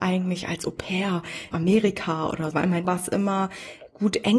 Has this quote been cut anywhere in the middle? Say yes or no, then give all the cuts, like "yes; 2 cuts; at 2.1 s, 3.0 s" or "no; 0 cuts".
yes; 3 cuts; at 1.5 s, 2.5 s, 2.8 s